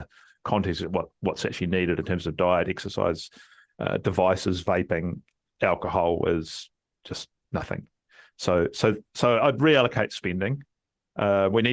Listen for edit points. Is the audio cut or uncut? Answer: uncut